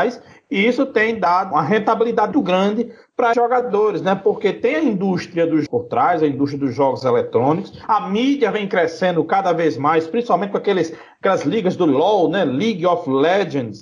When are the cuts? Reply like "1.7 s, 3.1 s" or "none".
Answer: 1.5 s, 2.3 s, 3.3 s, 5.7 s